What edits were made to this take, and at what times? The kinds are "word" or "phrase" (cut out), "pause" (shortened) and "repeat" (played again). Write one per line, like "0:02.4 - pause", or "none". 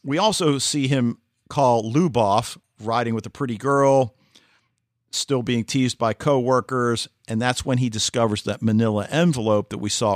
none